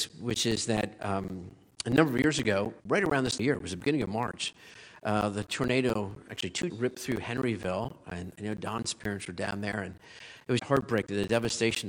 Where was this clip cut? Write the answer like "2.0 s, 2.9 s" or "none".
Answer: 2.8 s, 3.4 s, 6.7 s, 10.6 s